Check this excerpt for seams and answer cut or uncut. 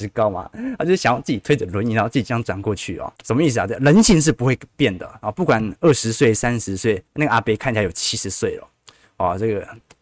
cut